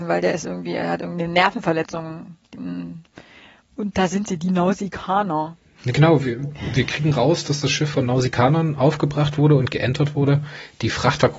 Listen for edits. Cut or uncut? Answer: cut